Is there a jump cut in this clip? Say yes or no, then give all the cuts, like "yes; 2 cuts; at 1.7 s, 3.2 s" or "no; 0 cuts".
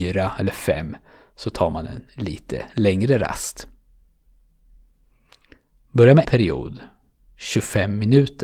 yes; 1 cut; at 6.2 s